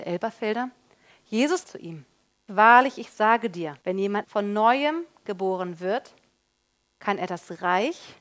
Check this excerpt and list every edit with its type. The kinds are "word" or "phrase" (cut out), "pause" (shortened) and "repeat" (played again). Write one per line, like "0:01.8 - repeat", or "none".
0:01.6 - phrase
0:02.5 - word
0:03.8 - pause
0:04.2 - word

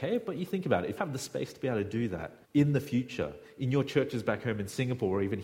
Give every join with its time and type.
0:01.0 - word
0:02.4 - pause

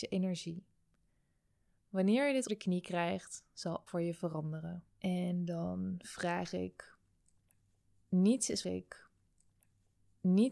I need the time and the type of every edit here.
0:02.5 - word
0:03.9 - word
0:04.9 - pause
0:08.6 - repeat

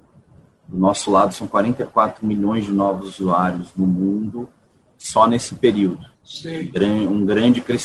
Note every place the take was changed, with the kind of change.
0:06.1 - pause

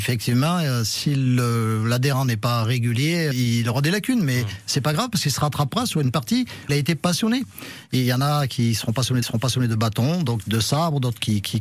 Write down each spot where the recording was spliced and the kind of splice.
0:03.3 - word
0:06.7 - word
0:09.2 - repeat

